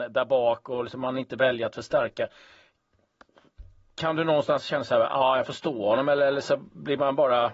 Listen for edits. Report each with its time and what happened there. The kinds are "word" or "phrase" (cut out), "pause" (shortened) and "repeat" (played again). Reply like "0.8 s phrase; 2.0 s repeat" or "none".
none